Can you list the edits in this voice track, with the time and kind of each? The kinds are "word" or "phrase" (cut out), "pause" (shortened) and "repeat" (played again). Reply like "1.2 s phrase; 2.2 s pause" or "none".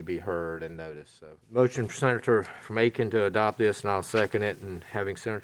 1.4 s pause